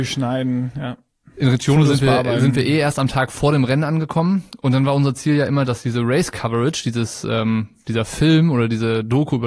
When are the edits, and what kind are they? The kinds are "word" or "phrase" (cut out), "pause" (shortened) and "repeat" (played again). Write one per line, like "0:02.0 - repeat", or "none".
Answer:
none

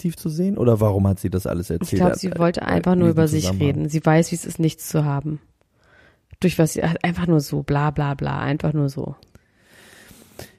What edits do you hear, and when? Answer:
none

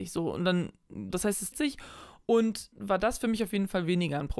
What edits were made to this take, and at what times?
0:01.1 - word
0:01.5 - word
0:02.7 - word

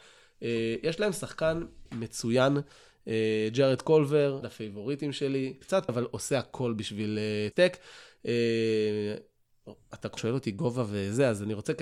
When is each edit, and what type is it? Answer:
0:01.9 - word
0:04.4 - word
0:05.9 - word
0:07.5 - word
0:10.2 - word

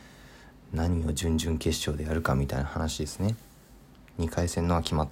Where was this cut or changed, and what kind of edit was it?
none

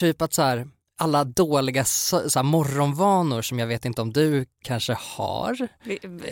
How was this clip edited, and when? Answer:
none

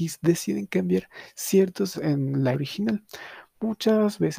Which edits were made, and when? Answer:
0:01.9 - word
0:02.5 - word

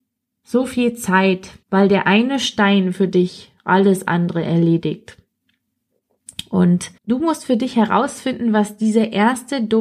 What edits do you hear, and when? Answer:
0:01.6 - pause
0:07.0 - pause

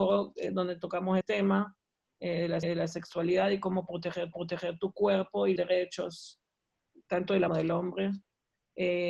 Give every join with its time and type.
0:01.2 - word
0:02.6 - repeat
0:04.3 - repeat
0:05.6 - word
0:06.9 - word
0:07.5 - phrase

